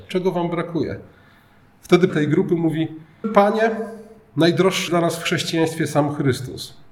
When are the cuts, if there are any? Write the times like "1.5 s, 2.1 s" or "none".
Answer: 2.1 s, 3.2 s, 4.9 s